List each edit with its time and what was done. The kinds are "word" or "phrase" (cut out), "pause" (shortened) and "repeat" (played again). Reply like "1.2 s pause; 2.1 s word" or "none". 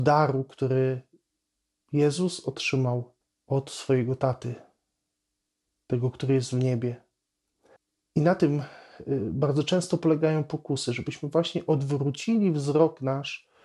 3.2 s pause; 7.8 s pause